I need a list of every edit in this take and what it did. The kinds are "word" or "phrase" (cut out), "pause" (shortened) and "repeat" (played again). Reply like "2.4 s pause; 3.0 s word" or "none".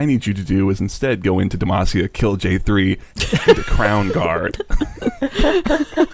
3.1 s pause